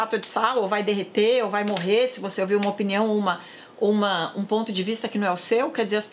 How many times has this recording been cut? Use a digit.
0